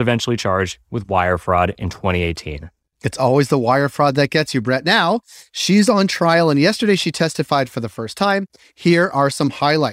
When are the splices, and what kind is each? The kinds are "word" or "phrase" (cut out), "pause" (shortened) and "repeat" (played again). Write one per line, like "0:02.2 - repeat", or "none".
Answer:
none